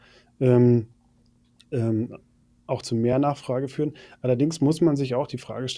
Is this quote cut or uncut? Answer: uncut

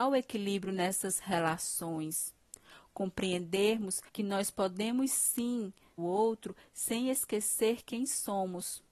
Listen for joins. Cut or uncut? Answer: cut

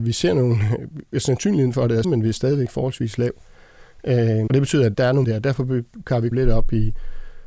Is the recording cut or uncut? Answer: cut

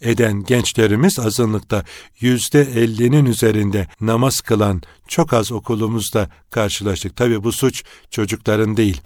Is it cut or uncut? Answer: cut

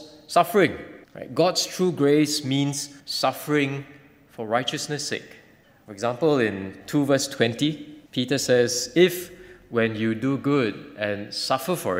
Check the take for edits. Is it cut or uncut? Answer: cut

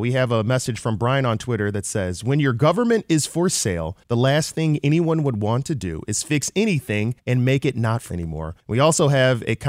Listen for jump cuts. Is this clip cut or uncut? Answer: cut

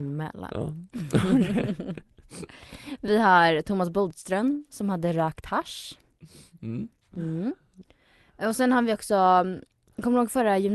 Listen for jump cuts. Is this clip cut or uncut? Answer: uncut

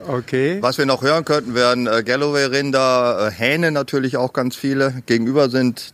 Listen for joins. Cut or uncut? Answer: uncut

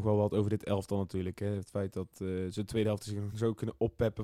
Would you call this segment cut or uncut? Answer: uncut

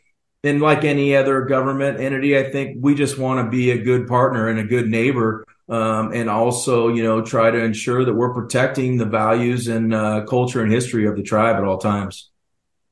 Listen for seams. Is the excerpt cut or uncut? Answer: uncut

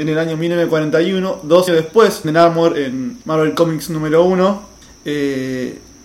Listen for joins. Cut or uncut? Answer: cut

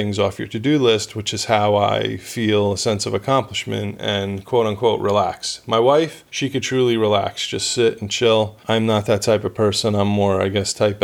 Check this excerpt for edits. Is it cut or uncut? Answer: cut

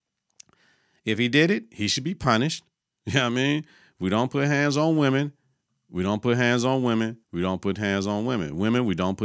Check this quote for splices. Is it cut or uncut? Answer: cut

